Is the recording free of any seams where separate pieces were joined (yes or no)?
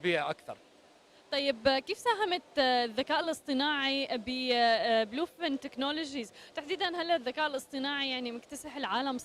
yes